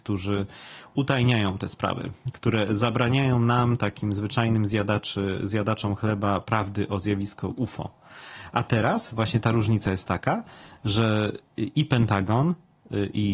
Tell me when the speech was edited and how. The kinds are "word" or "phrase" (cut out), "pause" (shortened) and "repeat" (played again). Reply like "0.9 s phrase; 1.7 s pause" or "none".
none